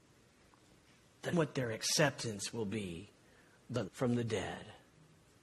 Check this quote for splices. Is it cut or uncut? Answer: cut